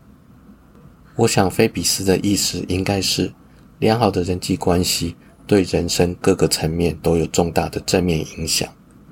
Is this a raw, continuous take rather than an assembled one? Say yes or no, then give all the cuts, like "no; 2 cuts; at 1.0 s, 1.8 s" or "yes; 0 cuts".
yes; 0 cuts